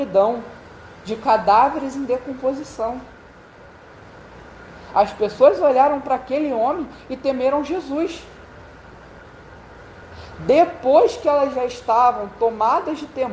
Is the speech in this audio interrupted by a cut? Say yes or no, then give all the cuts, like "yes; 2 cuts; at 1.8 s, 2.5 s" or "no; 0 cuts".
no; 0 cuts